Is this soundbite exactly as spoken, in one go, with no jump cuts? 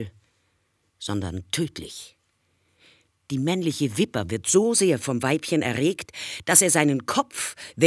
yes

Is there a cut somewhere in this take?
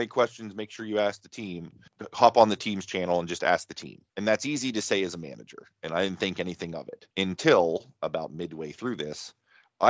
yes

